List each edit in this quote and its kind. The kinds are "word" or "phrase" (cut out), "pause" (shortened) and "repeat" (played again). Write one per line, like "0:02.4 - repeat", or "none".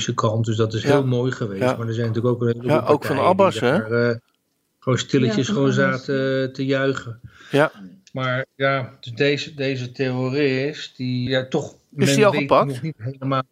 0:11.3 - word